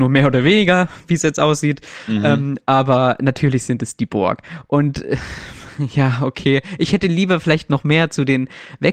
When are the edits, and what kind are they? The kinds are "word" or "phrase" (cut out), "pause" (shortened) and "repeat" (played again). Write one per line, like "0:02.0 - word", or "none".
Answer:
none